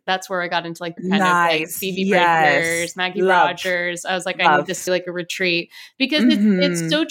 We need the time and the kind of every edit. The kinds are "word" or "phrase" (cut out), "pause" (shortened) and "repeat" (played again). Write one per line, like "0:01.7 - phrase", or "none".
0:01.0 - phrase
0:04.9 - word